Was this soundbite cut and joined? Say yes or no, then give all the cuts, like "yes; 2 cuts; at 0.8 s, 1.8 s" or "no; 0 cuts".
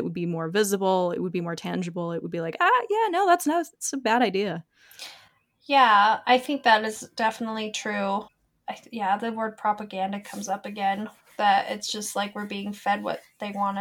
no; 0 cuts